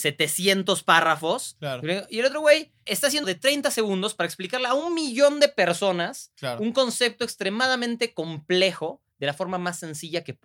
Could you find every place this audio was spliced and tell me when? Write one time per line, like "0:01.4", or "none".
0:02.9
0:03.2